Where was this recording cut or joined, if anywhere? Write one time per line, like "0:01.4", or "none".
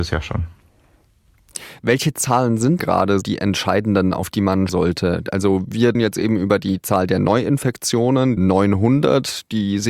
0:02.8
0:03.2
0:04.7
0:05.9
0:08.4